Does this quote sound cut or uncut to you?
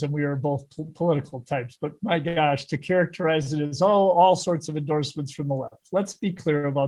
uncut